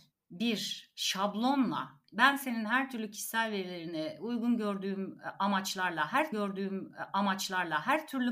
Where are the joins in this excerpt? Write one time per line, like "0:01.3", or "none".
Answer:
0:06.3